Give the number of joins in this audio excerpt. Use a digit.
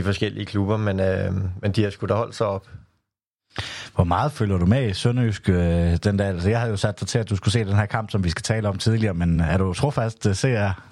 0